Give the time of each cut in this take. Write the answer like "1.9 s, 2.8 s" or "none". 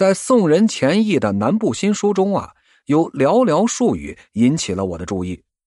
none